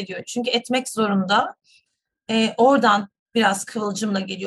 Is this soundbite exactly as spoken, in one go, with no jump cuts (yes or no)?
yes